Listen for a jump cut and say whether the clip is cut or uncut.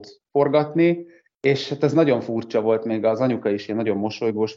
uncut